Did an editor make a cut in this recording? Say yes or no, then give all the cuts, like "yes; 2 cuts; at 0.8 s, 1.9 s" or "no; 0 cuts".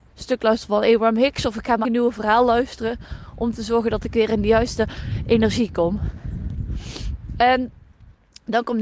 yes; 1 cut; at 1.8 s